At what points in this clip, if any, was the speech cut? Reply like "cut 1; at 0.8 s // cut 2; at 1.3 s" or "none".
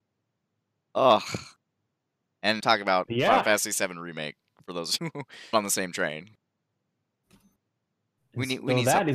cut 1; at 2.6 s // cut 2; at 5.0 s // cut 3; at 5.5 s